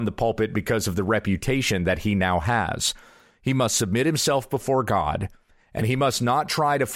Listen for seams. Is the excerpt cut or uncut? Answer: uncut